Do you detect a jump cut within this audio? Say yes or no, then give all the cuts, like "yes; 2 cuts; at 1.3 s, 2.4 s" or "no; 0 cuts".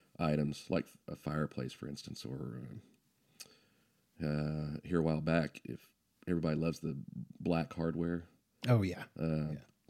no; 0 cuts